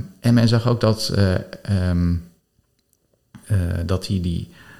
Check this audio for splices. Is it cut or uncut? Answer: cut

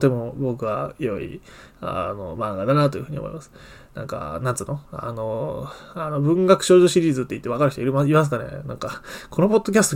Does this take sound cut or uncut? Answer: uncut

